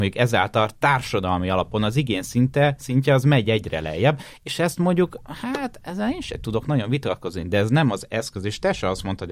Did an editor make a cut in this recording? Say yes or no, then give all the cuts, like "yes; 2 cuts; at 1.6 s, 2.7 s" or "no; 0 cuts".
no; 0 cuts